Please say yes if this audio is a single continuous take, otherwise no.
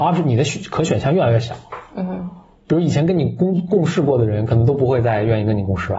yes